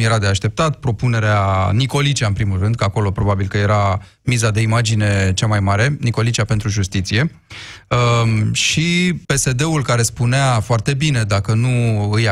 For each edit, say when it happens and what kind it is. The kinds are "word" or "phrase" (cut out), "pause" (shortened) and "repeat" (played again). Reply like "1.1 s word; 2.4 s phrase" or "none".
9.2 s pause